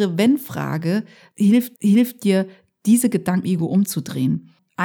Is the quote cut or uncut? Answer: cut